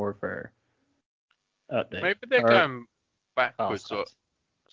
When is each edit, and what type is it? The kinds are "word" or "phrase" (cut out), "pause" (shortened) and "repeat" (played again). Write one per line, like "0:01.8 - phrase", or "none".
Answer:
none